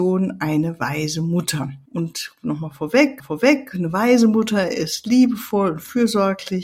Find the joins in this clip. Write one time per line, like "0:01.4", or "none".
0:01.9
0:03.2

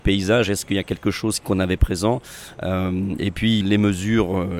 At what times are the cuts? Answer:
0:01.4
0:01.8
0:03.6

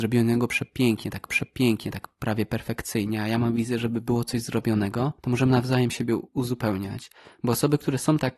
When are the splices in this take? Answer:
0:01.3
0:05.2
0:06.3

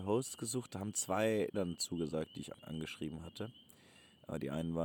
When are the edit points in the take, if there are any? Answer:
0:01.5
0:02.5

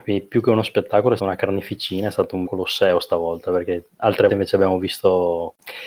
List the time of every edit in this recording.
0:01.2
0:02.5
0:04.3

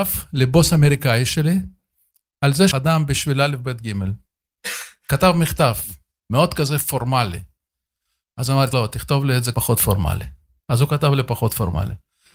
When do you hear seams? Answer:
0:02.7
0:08.7
0:09.5

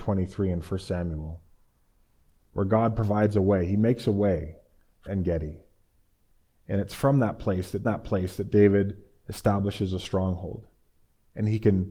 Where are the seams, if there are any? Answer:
0:05.1
0:07.8

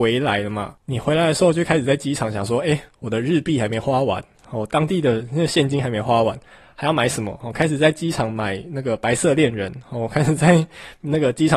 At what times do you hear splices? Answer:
none

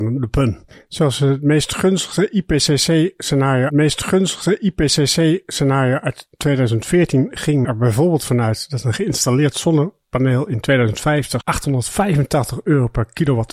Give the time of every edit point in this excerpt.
0:03.7
0:07.6
0:11.4

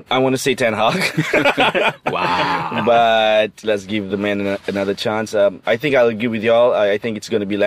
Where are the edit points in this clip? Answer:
none

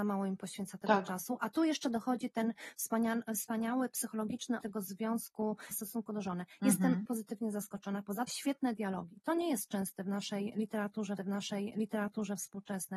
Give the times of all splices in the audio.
0:04.6
0:05.7
0:07.0
0:08.3
0:11.2

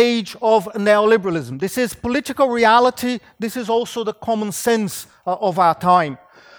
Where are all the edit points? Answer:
none

